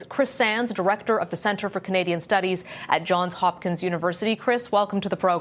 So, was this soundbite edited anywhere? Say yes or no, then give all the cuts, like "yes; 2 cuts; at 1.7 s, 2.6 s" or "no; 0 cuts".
no; 0 cuts